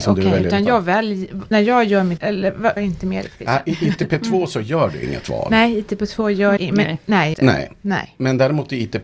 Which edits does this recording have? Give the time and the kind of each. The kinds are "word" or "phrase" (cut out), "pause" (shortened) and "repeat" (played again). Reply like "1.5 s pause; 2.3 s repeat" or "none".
1.5 s word; 2.2 s word; 2.8 s word; 6.6 s word; 7.3 s word